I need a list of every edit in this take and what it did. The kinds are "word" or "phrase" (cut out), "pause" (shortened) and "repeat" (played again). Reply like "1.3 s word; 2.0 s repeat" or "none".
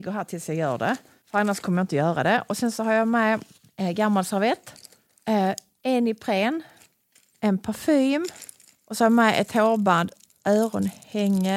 none